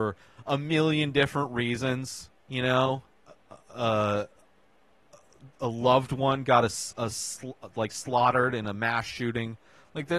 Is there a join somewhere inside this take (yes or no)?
yes